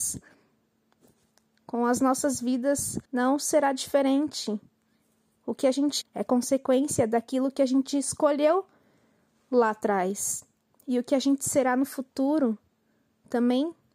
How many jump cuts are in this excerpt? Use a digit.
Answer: 3